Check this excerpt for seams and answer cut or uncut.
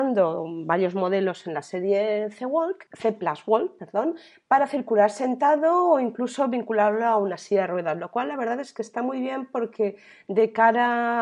uncut